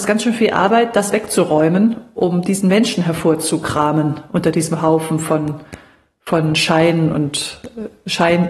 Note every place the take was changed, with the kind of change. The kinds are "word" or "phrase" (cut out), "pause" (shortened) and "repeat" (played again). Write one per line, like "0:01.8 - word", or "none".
none